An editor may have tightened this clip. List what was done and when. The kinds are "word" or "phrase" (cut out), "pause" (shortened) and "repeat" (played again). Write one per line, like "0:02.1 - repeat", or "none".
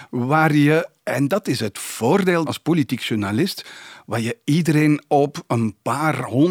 0:02.5 - word